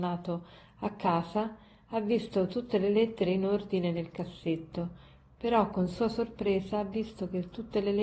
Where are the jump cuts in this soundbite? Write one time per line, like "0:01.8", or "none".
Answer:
none